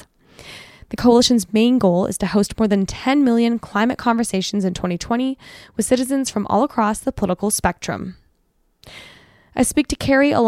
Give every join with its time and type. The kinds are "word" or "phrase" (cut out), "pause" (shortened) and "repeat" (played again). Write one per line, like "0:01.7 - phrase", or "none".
none